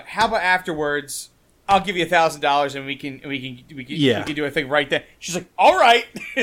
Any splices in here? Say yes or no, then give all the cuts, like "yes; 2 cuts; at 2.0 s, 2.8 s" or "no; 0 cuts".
no; 0 cuts